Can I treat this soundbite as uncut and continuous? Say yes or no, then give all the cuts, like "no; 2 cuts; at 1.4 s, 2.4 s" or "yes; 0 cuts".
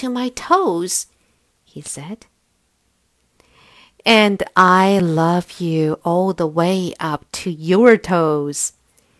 yes; 0 cuts